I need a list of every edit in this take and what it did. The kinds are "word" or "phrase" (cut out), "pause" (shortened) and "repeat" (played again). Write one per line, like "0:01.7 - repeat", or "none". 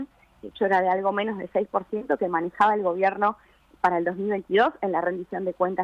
none

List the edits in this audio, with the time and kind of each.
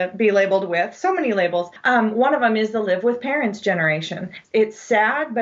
none

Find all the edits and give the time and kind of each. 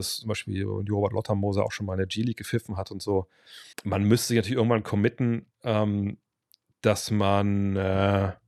0:03.7 - pause

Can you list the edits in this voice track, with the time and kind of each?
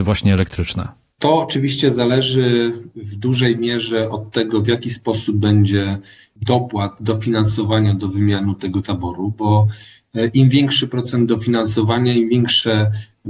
none

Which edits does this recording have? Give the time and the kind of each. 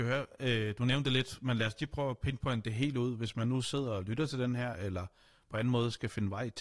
none

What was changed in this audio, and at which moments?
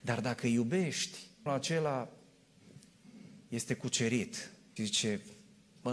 0:01.5 - word
0:04.8 - word

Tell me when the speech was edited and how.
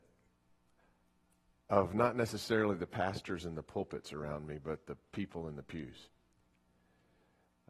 none

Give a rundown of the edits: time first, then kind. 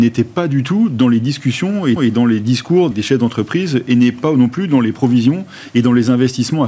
0:02.0 - repeat
0:02.9 - word

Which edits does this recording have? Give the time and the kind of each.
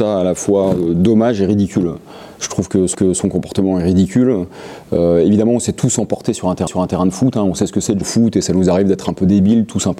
0:02.9 - repeat
0:06.7 - repeat
0:08.0 - word

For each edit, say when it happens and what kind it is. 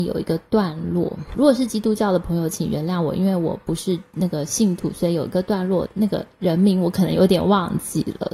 0:01.3 - phrase

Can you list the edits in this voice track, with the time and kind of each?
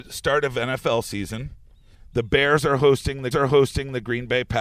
0:03.3 - repeat

